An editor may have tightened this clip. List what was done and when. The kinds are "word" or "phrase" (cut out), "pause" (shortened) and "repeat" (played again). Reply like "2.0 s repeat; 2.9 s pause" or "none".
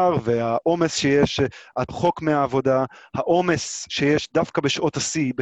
1.9 s word